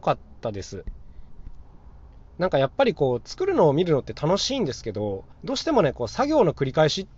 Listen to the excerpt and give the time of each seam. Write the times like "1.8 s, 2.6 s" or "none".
5.3 s